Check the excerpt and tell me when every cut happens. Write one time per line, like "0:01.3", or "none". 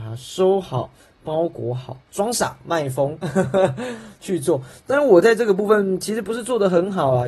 0:02.0